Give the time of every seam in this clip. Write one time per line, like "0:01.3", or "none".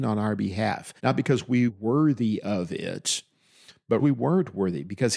0:01.0
0:01.7
0:04.0